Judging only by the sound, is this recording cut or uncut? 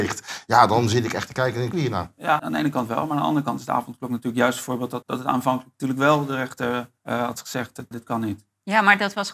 cut